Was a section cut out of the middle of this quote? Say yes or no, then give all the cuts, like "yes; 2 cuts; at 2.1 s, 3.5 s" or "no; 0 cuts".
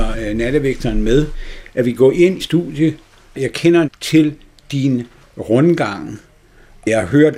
yes; 2 cuts; at 2.4 s, 3.8 s